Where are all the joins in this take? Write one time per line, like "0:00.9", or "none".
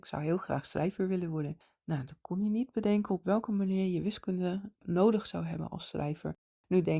none